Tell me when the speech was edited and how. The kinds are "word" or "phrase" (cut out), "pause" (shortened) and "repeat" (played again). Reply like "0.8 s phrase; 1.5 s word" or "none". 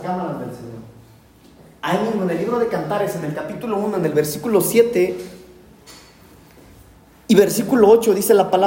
none